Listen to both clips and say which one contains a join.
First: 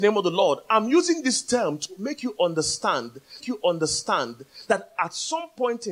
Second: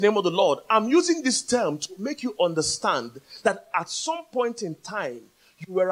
first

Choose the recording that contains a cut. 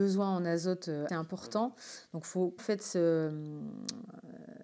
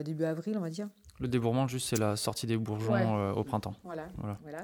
first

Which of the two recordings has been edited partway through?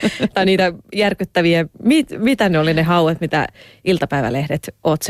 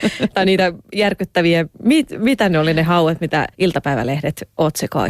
second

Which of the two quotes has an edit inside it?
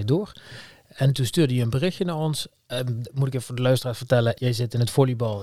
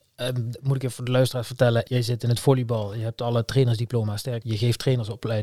second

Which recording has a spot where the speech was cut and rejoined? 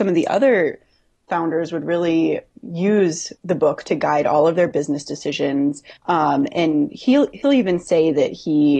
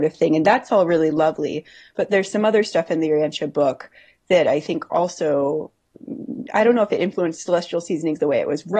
first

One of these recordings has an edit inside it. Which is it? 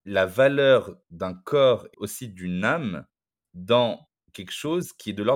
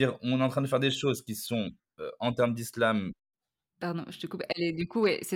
first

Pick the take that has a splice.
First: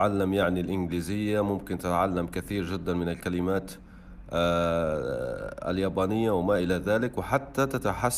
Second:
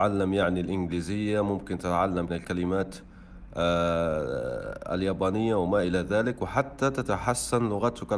second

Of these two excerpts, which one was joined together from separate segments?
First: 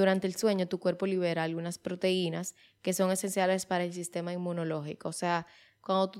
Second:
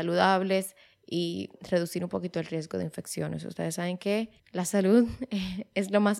second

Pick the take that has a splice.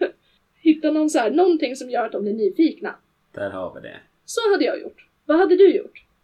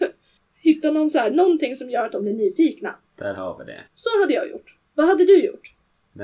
second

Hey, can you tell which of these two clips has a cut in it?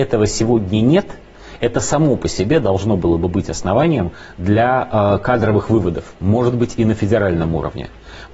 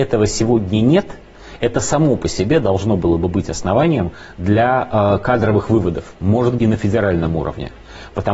second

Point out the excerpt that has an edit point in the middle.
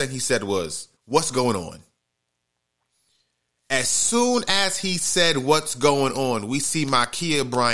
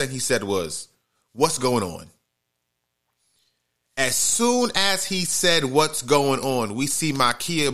first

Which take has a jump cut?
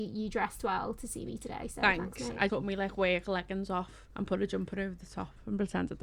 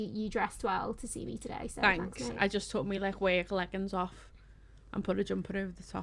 first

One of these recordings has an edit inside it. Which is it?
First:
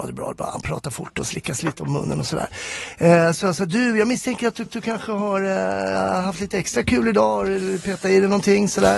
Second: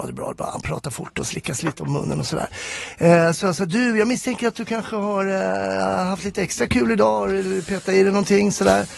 first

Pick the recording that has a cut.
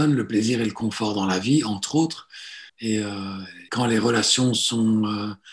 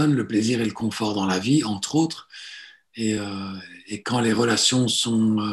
first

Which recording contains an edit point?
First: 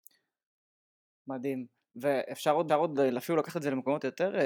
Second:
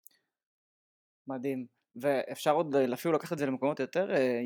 first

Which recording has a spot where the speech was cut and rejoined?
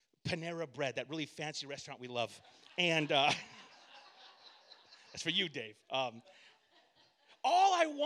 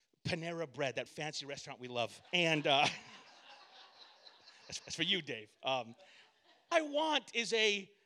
second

